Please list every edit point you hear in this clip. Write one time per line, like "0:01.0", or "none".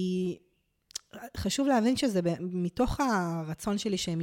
none